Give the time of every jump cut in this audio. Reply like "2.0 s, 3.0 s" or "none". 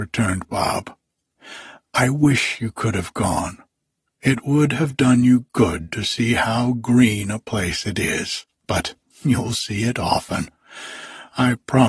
8.5 s